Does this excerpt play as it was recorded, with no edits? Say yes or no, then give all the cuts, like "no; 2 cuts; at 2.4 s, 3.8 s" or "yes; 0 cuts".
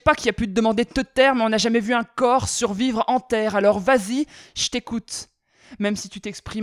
yes; 0 cuts